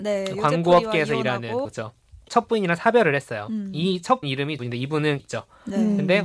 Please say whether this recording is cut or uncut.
cut